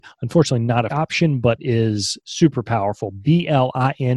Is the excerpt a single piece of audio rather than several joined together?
no; 3 cuts; at 0.9 s, 1.6 s, 2.2 s

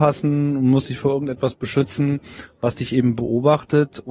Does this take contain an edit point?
no; 0 cuts

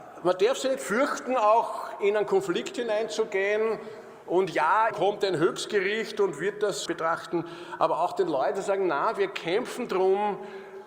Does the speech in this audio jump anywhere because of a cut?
yes; 2 cuts; at 4.9 s, 6.9 s

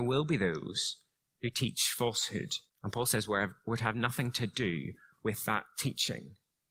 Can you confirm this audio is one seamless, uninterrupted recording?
no; 2 cuts; at 1.2 s, 2.7 s

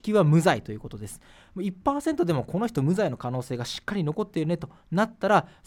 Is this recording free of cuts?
yes; 0 cuts

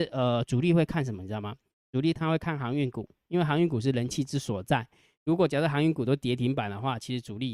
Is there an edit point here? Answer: no; 0 cuts

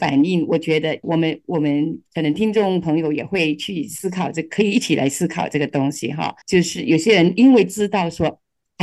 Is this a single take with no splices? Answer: no; 2 cuts; at 1.0 s, 6.4 s

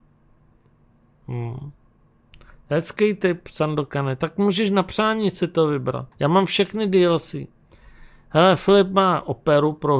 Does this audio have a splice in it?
yes; 1 cut; at 6.1 s

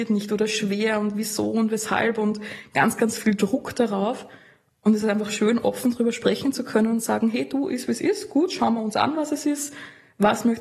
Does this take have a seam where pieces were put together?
no; 0 cuts

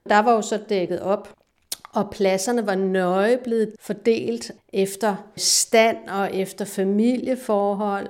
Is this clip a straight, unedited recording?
yes; 0 cuts

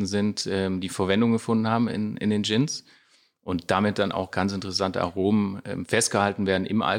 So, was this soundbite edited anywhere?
no; 0 cuts

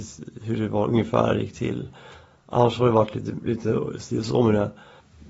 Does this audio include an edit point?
no; 0 cuts

